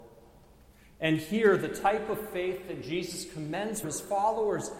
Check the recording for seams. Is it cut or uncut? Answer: cut